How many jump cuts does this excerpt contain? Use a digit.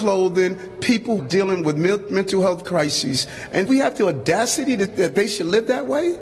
3